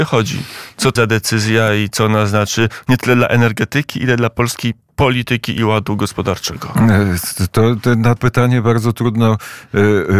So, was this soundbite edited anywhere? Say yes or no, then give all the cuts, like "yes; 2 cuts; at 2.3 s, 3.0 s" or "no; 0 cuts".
yes; 2 cuts; at 1.0 s, 8.2 s